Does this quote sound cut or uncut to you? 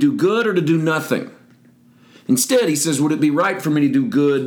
uncut